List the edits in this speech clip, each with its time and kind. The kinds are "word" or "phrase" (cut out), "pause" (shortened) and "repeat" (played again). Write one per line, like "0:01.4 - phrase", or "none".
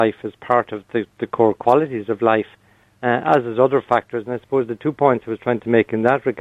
none

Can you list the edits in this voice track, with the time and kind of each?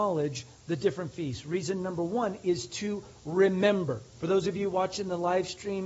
0:04.1 - pause

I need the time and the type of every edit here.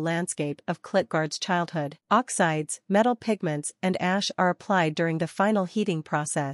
0:02.0 - pause

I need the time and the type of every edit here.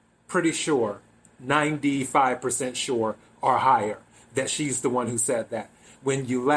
none

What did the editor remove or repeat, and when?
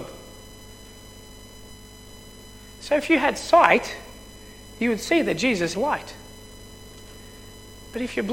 0:05.7 - word

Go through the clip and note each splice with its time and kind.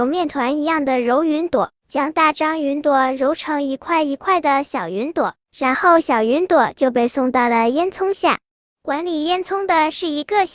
0:08.5 - pause

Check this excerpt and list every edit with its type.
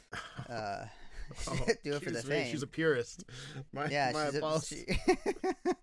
0:01.8 - word
0:04.6 - word

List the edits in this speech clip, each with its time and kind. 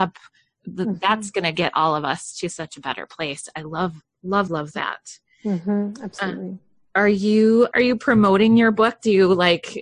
0:04.5 - word
0:07.7 - word

